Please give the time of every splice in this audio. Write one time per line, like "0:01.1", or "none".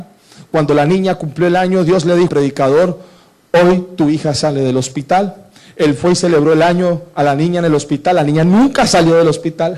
0:02.3